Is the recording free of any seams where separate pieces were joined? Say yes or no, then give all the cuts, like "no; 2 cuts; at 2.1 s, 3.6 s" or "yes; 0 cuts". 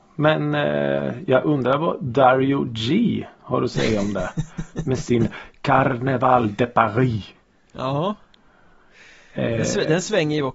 yes; 0 cuts